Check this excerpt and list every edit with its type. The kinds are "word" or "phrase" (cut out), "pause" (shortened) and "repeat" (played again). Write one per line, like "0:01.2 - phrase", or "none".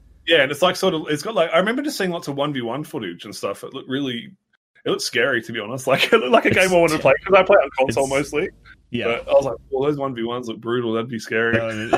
none